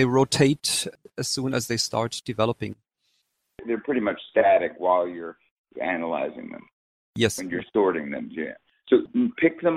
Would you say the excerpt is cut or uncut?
uncut